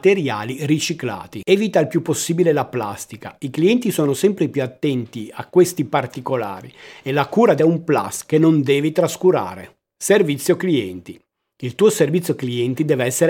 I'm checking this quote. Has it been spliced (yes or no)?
yes